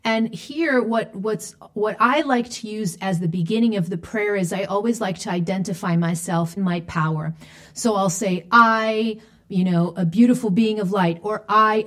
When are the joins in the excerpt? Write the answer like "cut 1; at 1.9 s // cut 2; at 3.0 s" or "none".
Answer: cut 1; at 6.6 s